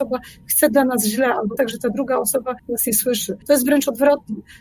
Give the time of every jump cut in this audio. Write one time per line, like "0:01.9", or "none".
0:01.6
0:02.6
0:03.4